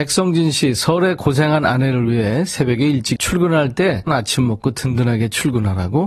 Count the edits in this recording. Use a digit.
2